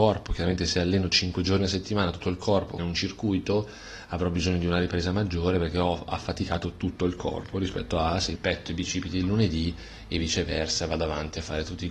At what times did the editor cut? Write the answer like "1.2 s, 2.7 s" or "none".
2.8 s, 8.4 s